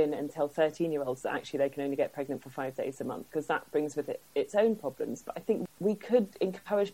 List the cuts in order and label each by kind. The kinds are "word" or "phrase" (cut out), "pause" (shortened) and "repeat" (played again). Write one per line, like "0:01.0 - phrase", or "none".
none